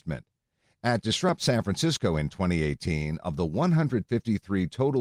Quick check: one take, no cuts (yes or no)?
yes